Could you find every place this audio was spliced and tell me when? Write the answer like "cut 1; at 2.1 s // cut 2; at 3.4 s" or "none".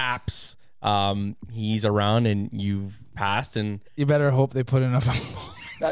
cut 1; at 3.9 s